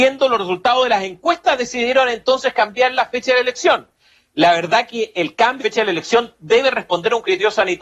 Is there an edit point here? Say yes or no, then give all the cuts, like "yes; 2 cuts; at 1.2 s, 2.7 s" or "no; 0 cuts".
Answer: yes; 1 cut; at 5.6 s